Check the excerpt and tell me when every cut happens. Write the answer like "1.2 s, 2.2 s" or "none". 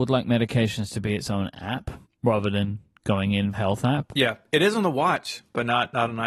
2.0 s, 3.5 s